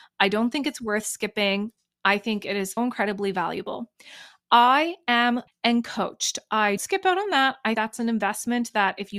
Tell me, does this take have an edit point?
yes; 4 cuts; at 2.8 s, 5.5 s, 6.8 s, 7.7 s

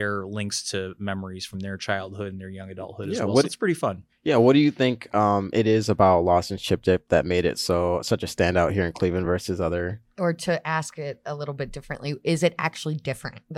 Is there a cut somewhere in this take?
no; 0 cuts

